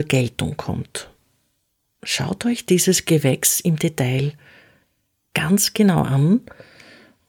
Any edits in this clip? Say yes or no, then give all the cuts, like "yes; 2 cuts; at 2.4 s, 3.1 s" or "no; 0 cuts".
no; 0 cuts